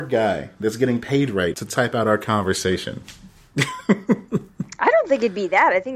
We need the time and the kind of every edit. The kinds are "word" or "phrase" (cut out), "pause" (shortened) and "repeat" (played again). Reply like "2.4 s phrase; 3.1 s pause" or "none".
1.5 s word